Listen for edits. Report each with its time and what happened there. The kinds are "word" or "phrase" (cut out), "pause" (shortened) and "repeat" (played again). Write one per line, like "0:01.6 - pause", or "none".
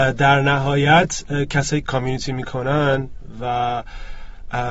0:01.8 - phrase